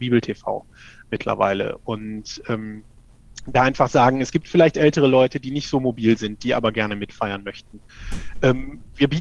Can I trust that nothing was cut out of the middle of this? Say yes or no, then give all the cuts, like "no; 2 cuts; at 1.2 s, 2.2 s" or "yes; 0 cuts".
yes; 0 cuts